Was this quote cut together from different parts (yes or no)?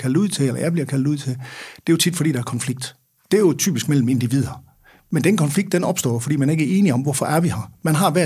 no